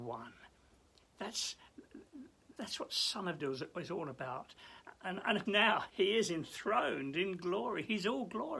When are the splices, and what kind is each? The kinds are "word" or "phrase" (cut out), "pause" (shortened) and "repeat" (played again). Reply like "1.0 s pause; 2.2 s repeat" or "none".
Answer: 2.6 s word; 3.4 s word; 5.5 s word; 5.9 s word

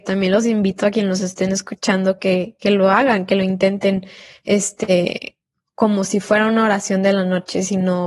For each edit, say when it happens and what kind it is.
none

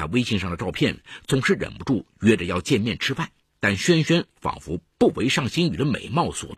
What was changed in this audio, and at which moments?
3.4 s pause

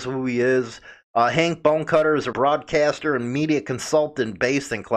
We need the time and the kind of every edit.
2.3 s word

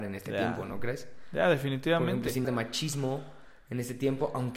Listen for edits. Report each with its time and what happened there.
2.4 s word

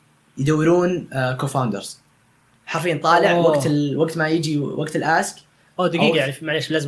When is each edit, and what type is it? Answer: none

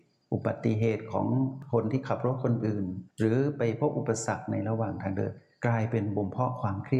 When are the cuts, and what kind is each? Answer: 3.1 s pause

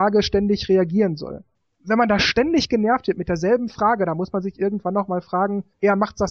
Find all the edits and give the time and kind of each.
none

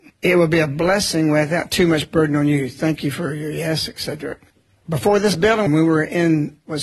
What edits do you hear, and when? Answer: 4.5 s pause; 5.7 s phrase

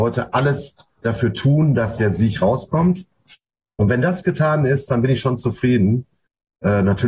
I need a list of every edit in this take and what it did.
2.0 s word

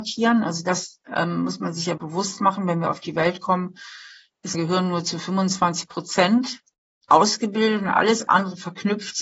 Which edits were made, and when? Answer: 2.0 s word; 4.5 s word

